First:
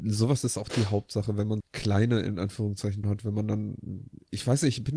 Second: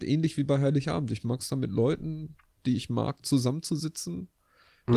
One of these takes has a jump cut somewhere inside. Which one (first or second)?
first